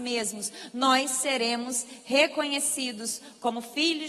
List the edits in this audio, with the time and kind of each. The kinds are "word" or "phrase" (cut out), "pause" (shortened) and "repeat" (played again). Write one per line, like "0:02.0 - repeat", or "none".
none